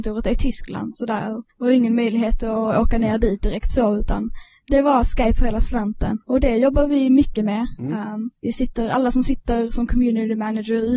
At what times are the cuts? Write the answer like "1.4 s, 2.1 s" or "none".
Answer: 1.5 s, 6.2 s, 8.4 s